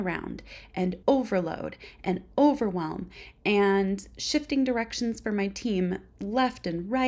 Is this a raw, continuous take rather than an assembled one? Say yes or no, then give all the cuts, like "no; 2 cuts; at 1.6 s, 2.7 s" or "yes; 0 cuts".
no; 1 cut; at 1.0 s